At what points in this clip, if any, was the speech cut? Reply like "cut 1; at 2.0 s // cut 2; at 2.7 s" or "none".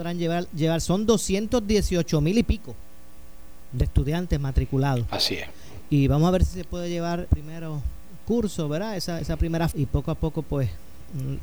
cut 1; at 7.3 s // cut 2; at 9.2 s // cut 3; at 9.7 s